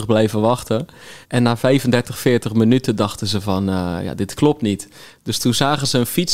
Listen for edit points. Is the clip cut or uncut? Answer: cut